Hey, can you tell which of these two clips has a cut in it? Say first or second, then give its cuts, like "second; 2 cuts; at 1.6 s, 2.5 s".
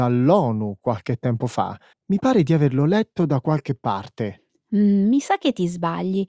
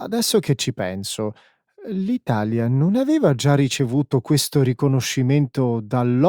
first; 1 cut; at 1.9 s